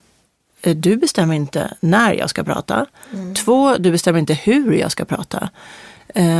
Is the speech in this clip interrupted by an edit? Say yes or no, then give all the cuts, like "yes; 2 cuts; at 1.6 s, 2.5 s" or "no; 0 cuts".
no; 0 cuts